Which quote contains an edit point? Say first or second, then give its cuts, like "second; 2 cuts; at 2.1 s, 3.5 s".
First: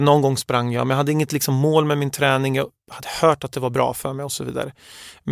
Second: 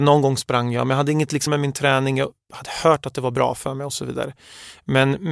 second; 1 cut; at 1.5 s